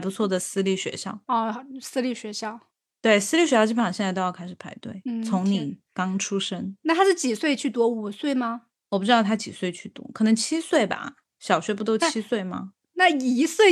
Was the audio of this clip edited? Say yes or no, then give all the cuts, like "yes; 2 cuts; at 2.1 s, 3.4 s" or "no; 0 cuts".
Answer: no; 0 cuts